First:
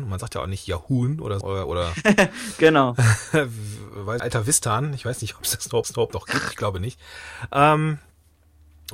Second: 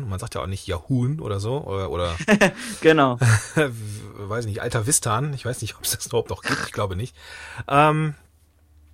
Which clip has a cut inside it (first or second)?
first